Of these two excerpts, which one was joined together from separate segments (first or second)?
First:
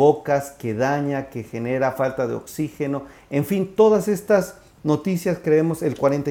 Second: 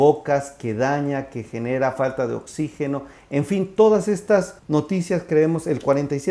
second